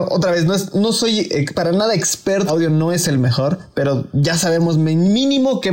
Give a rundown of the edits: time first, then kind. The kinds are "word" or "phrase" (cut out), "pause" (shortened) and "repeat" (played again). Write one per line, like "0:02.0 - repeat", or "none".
0:02.5 - phrase